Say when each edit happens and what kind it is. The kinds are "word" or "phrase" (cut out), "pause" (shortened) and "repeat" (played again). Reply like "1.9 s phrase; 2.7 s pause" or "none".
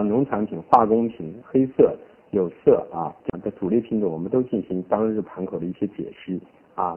3.2 s pause